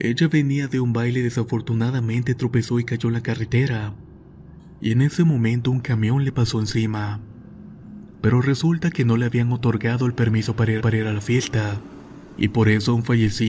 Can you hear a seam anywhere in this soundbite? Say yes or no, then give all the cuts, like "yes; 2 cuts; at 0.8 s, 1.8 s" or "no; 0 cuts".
yes; 1 cut; at 10.8 s